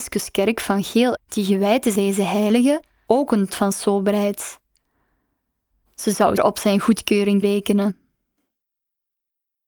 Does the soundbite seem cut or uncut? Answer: cut